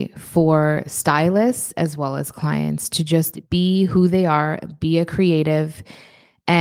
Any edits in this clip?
yes; 1 cut; at 3.4 s

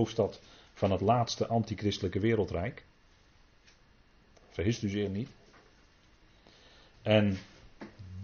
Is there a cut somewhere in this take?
no; 0 cuts

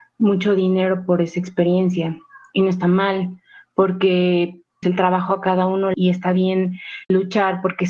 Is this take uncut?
no; 2 cuts; at 4.8 s, 5.9 s

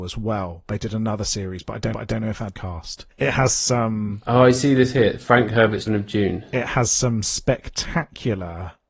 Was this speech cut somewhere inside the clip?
yes; 4 cuts; at 1.9 s, 2.5 s, 3.1 s, 5.9 s

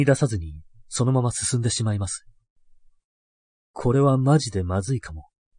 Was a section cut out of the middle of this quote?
no; 0 cuts

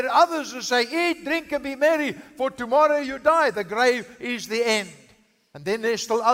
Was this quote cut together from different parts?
no; 0 cuts

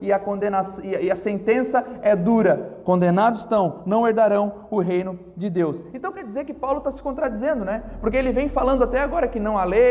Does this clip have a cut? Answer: no; 0 cuts

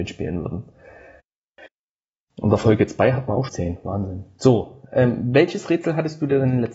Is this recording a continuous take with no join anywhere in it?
no; 1 cut; at 3.5 s

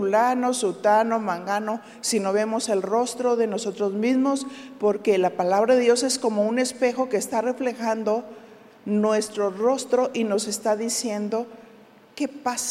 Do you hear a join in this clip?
no; 0 cuts

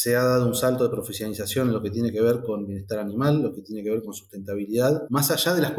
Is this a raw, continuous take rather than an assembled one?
yes; 0 cuts

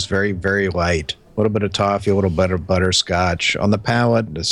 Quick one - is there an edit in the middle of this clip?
yes; 1 cut; at 1.2 s

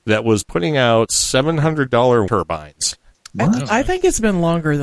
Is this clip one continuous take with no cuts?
no; 1 cut; at 2.3 s

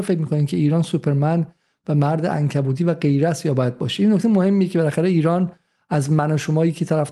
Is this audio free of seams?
yes; 0 cuts

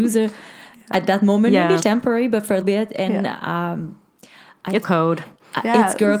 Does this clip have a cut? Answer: yes; 3 cuts; at 1.8 s, 2.6 s, 4.8 s

